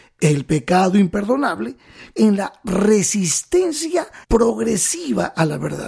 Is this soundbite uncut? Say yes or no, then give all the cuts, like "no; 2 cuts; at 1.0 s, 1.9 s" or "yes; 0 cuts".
no; 2 cuts; at 2.2 s, 4.2 s